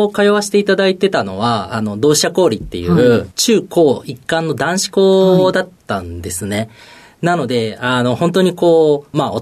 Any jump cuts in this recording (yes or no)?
no